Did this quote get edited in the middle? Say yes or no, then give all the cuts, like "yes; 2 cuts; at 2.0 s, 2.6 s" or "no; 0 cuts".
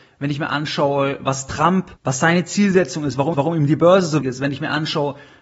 yes; 3 cuts; at 2.0 s, 3.3 s, 4.2 s